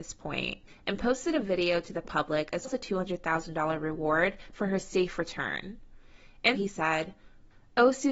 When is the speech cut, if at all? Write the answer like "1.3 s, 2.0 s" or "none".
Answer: 2.6 s, 6.5 s

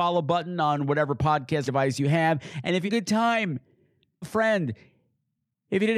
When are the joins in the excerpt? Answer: 1.7 s, 2.9 s, 4.2 s

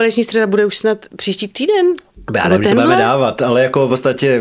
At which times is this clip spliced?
none

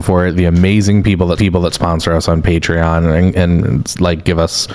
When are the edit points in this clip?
1.4 s

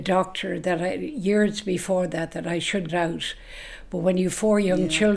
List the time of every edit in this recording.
2.9 s

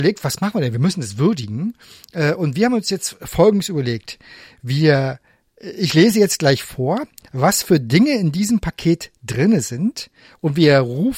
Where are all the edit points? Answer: none

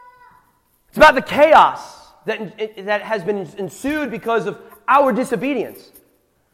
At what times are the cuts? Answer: none

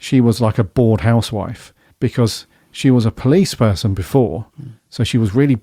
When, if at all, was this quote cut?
1.9 s

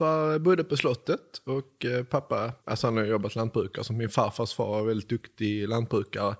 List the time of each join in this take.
2.6 s

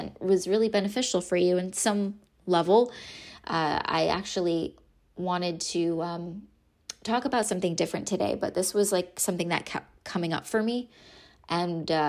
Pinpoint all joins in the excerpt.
none

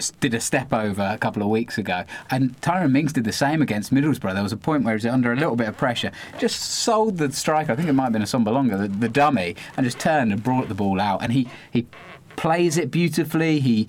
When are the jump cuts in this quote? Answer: none

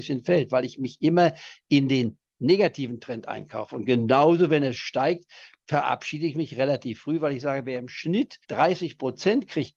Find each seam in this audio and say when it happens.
2.3 s, 8.4 s

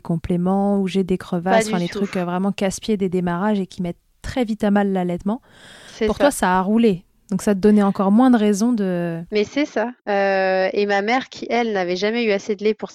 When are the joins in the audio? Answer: 10.0 s

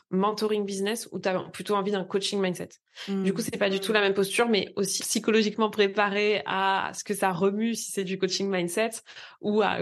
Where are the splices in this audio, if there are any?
5.0 s

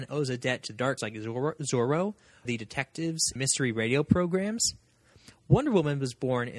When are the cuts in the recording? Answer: 1.0 s, 2.4 s, 3.4 s

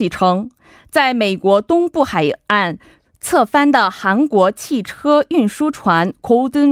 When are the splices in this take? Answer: none

